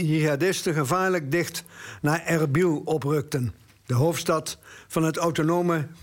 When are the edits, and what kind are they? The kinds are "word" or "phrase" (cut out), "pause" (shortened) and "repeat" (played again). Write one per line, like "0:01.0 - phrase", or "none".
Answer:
none

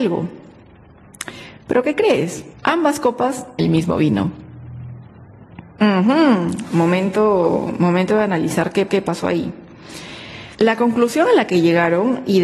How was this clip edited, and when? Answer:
0:02.5 - pause
0:03.6 - word
0:08.9 - repeat
0:10.5 - pause

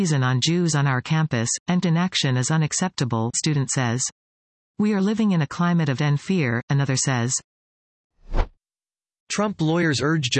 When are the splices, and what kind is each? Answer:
0:01.8 - word
0:03.3 - word
0:06.0 - word

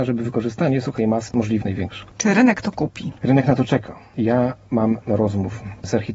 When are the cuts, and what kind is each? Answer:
0:01.3 - word
0:01.6 - word
0:03.2 - pause
0:05.0 - word

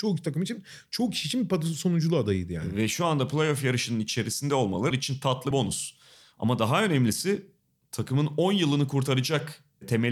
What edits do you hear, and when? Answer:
0:04.9 - word
0:05.5 - word

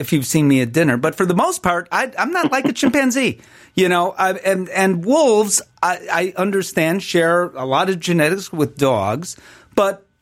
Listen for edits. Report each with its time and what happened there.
none

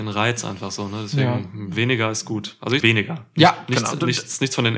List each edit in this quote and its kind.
0:02.8 - word

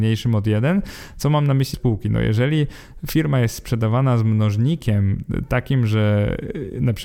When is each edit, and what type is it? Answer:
0:01.7 - word

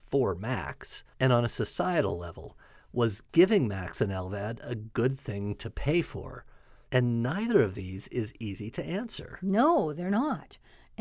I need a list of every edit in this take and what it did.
0:01.1 - pause
0:03.3 - pause

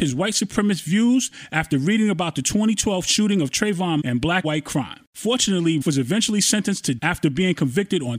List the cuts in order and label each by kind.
0:04.0 - word
0:04.4 - word
0:05.8 - word
0:07.0 - word

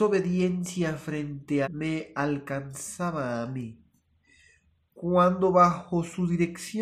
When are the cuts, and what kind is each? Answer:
0:01.6 - phrase

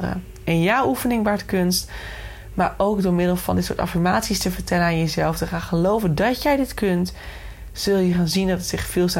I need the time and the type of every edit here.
none

